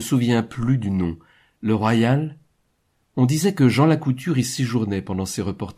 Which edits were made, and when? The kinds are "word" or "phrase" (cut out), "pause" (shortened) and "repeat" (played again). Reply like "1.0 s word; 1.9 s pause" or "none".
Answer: none